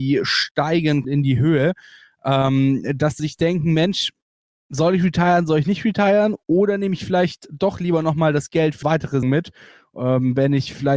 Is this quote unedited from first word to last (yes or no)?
no